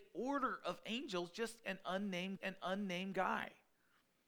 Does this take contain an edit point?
yes; 1 cut; at 2.4 s

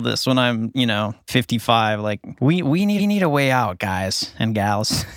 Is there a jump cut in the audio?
yes; 1 cut; at 3.0 s

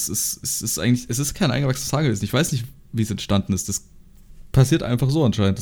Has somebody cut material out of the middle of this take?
no; 0 cuts

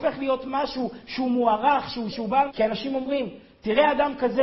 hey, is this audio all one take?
no; 2 cuts; at 2.1 s, 2.5 s

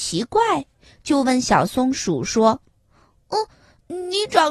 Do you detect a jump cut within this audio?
no; 0 cuts

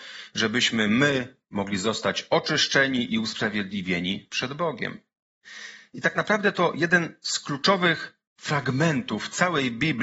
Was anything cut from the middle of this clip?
no; 0 cuts

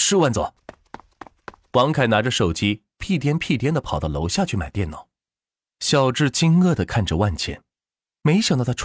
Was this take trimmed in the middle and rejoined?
no; 0 cuts

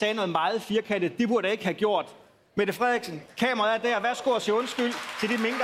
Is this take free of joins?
yes; 0 cuts

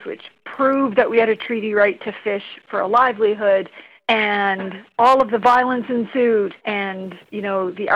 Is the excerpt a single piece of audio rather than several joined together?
no; 2 cuts; at 4.0 s, 6.6 s

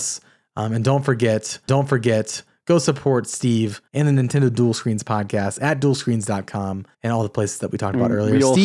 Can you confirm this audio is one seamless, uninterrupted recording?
no; 3 cuts; at 1.7 s, 3.9 s, 6.9 s

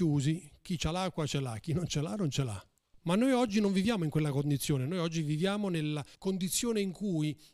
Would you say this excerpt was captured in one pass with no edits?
no; 2 cuts; at 2.8 s, 6.1 s

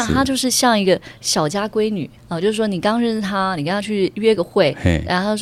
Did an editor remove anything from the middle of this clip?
yes; 1 cut; at 2.2 s

